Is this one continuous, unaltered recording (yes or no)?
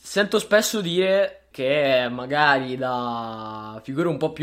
no